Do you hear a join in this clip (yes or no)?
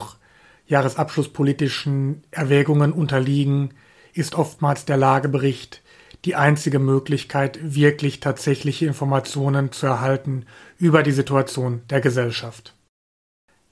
no